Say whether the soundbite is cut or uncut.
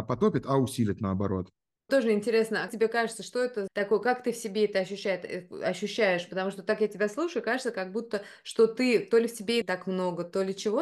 cut